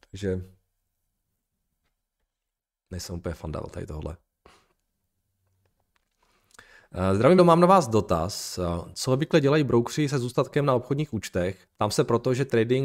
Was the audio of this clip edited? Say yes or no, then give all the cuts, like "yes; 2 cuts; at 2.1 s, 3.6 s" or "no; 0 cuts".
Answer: yes; 2 cuts; at 7.4 s, 11.7 s